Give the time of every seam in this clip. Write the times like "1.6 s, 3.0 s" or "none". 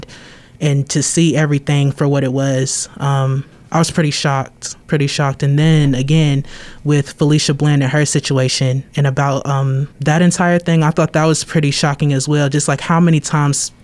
3.5 s, 4.8 s, 8.9 s, 9.9 s